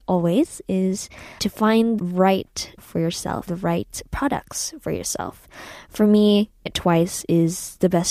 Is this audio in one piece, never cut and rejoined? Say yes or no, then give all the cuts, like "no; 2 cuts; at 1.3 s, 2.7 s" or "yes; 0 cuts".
no; 5 cuts; at 1.4 s, 2.0 s, 2.8 s, 3.5 s, 6.7 s